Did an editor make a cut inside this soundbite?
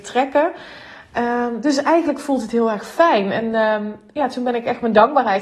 no; 0 cuts

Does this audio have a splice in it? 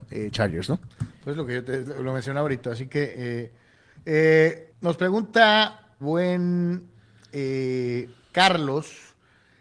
yes; 4 cuts; at 2.0 s, 4.7 s, 6.0 s, 8.2 s

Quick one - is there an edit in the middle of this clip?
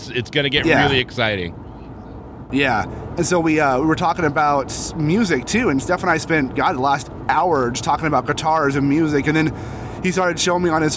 no; 0 cuts

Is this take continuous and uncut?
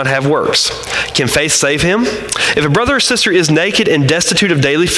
yes; 0 cuts

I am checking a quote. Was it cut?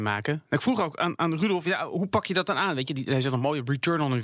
no; 0 cuts

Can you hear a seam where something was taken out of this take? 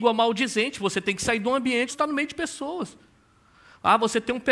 yes; 1 cut; at 1.9 s

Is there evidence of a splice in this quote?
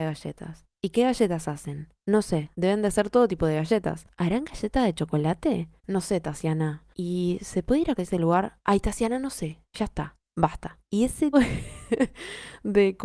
yes; 6 cuts; at 2.0 s, 2.5 s, 5.8 s, 6.9 s, 8.0 s, 11.3 s

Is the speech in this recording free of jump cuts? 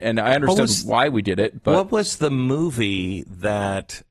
yes; 0 cuts

